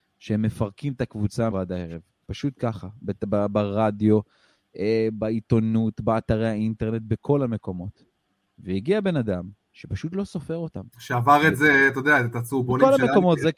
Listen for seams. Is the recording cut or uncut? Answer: cut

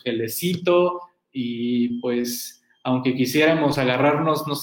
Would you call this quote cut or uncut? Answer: uncut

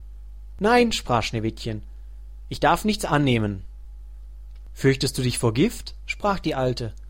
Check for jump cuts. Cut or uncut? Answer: uncut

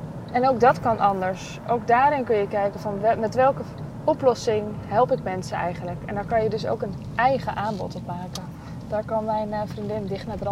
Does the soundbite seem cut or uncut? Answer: uncut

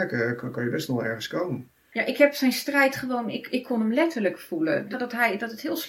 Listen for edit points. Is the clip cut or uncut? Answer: cut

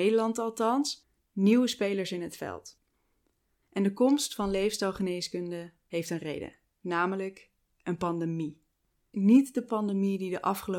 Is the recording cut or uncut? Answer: uncut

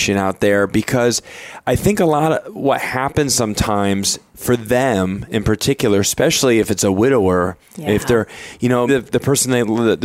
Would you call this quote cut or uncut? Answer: cut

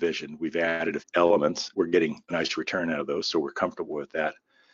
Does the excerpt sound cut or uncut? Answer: cut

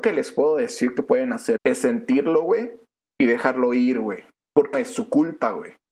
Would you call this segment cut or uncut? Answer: cut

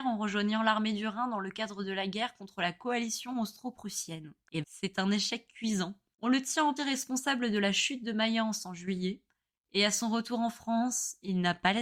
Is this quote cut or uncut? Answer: cut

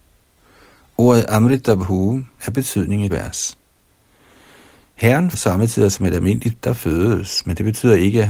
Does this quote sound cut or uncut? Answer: cut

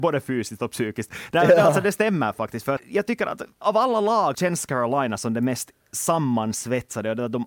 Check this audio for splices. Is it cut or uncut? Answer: cut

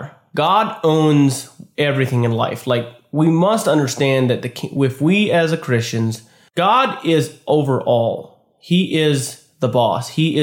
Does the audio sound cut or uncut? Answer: uncut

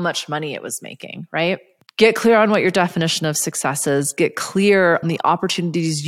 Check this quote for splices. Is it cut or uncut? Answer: cut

